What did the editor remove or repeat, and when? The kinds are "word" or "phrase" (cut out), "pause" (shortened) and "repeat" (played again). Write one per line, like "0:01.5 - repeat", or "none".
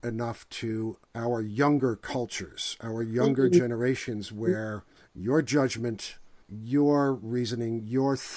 0:01.0 - pause
0:05.0 - pause
0:06.4 - pause